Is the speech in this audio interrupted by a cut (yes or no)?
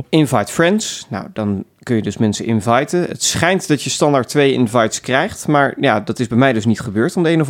no